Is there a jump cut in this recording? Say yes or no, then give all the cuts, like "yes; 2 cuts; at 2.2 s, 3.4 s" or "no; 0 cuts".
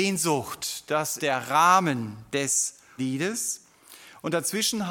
yes; 2 cuts; at 1.2 s, 3.0 s